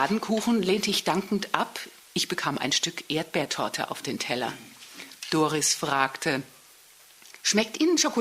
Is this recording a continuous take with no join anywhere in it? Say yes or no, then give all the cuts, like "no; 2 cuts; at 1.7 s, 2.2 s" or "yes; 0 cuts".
yes; 0 cuts